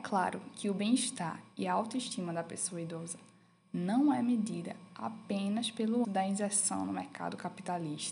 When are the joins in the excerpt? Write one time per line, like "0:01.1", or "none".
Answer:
0:06.0